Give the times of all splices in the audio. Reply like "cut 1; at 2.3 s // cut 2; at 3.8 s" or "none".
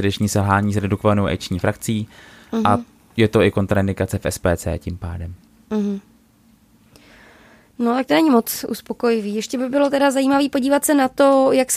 none